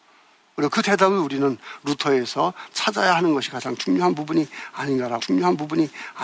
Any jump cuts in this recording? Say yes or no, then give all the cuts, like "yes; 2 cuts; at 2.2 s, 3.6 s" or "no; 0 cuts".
yes; 1 cut; at 5.2 s